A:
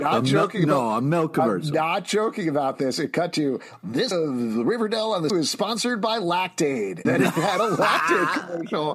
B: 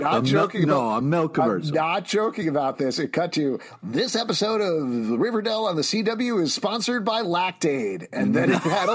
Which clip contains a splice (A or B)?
A